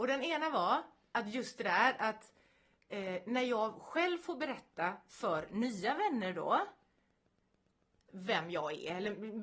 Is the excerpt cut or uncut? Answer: uncut